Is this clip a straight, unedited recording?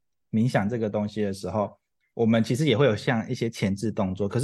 yes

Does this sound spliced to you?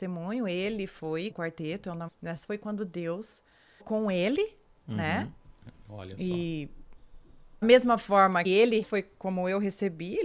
yes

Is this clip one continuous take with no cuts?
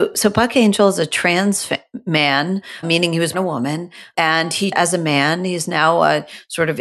no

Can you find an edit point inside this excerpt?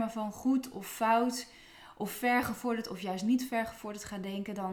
no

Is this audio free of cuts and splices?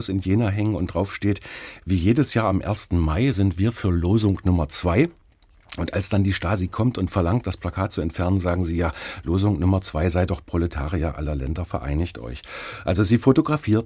yes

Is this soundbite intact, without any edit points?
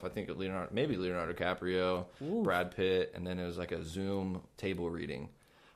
yes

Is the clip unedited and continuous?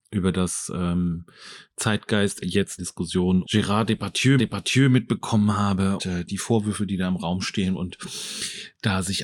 no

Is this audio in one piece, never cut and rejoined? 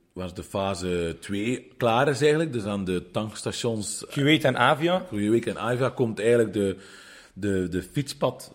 yes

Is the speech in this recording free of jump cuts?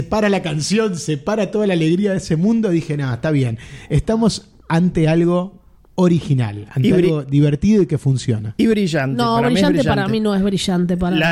yes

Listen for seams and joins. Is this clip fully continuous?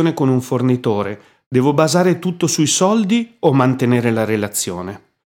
yes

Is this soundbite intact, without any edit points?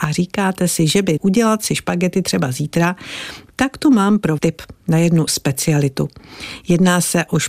no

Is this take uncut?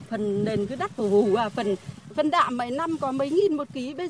yes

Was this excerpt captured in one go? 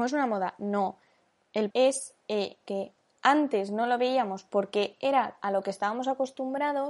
no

